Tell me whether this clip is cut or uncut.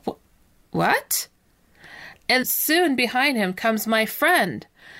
cut